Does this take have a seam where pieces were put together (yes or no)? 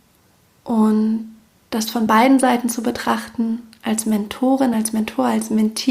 no